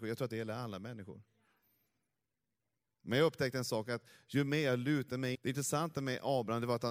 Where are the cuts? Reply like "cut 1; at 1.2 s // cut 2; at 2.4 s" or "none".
cut 1; at 5.3 s